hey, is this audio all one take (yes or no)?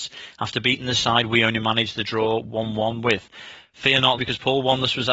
no